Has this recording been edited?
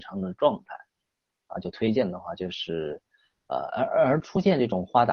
no; 0 cuts

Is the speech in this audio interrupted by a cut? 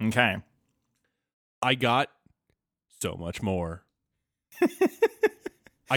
no; 0 cuts

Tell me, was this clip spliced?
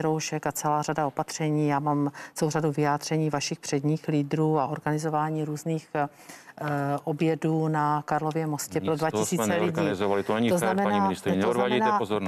no; 0 cuts

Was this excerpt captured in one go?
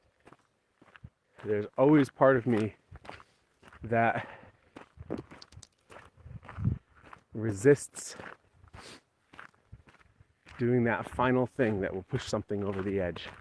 yes; 0 cuts

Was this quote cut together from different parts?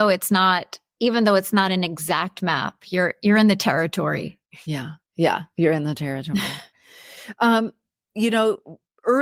no; 0 cuts

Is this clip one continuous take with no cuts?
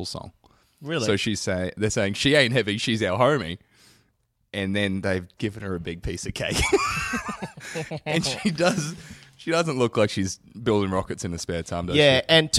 no; 1 cut; at 5.4 s

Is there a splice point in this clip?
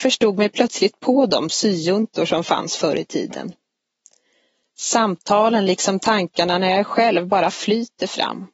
no; 0 cuts

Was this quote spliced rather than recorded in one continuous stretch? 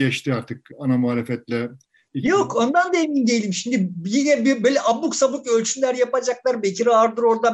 no; 0 cuts

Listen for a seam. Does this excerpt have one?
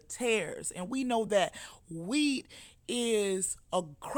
no; 0 cuts

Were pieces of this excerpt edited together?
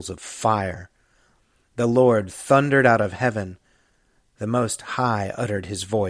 no; 0 cuts

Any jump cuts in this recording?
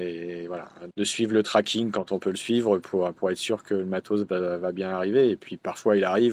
yes; 1 cut; at 0.9 s

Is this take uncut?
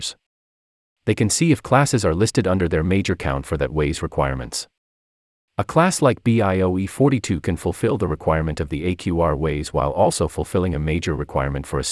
yes; 0 cuts

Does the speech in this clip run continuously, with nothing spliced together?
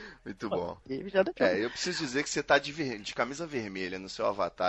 yes; 0 cuts

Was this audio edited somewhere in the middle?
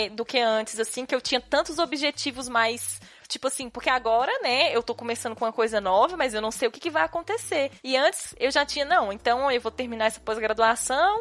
no; 0 cuts

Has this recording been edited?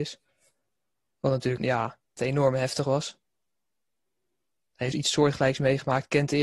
yes; 3 cuts; at 1.6 s, 2.2 s, 4.9 s

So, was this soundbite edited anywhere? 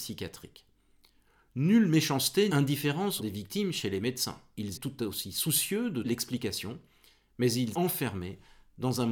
yes; 5 cuts; at 2.5 s, 3.2 s, 4.7 s, 6.0 s, 7.7 s

